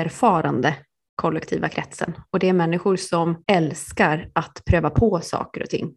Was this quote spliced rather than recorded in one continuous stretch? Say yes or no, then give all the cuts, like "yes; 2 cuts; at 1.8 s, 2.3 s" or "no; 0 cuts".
yes; 1 cut; at 3.4 s